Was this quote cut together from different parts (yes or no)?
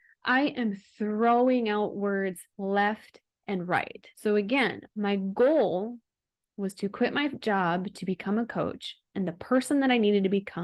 yes